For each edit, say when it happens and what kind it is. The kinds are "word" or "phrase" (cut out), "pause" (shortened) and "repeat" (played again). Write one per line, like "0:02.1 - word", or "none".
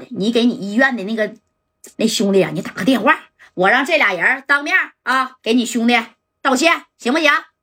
0:01.9 - pause
0:05.4 - pause